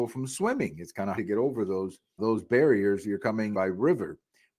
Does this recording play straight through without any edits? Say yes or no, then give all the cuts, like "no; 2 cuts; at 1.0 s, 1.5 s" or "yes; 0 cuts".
no; 4 cuts; at 1.2 s, 2.2 s, 3.0 s, 3.5 s